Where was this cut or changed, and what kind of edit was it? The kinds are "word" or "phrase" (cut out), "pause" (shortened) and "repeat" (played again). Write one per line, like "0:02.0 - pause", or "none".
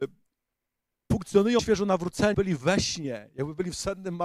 0:01.6 - word
0:02.3 - word